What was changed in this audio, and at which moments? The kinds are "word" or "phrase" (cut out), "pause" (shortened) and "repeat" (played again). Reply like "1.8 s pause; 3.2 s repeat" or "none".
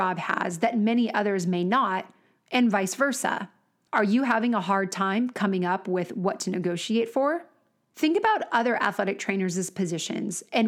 none

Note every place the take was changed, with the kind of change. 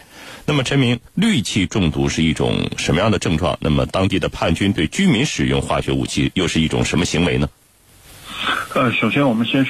1.1 s pause

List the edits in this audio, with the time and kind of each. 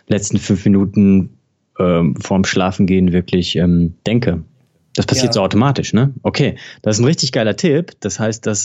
4.0 s pause

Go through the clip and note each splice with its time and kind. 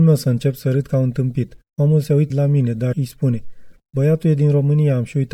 1.7 s pause; 2.3 s word; 2.9 s word

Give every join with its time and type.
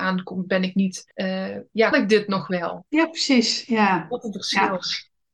1.1 s pause; 1.9 s word

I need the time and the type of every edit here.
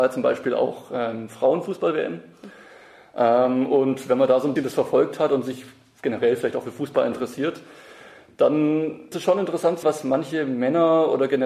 4.6 s word; 9.1 s word; 9.8 s word

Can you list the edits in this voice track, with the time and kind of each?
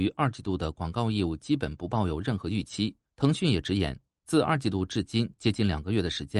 3.0 s pause

